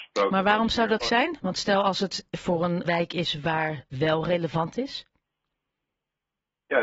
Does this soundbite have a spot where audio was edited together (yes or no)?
yes